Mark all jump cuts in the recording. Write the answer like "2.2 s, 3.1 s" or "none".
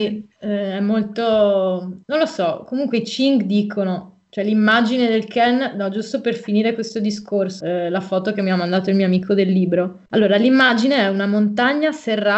2.0 s, 7.6 s, 10.1 s